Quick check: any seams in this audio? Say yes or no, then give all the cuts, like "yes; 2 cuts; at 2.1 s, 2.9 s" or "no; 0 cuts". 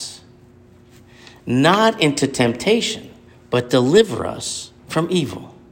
yes; 2 cuts; at 3.3 s, 4.8 s